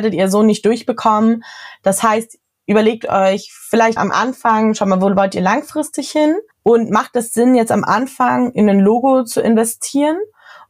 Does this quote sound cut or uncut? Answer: cut